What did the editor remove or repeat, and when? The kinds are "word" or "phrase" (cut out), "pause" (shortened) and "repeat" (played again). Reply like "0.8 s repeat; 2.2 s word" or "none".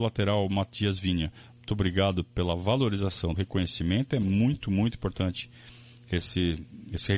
3.3 s phrase